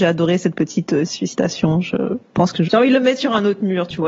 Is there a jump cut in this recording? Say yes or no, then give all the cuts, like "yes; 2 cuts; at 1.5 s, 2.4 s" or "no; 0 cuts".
yes; 2 cuts; at 1.1 s, 2.7 s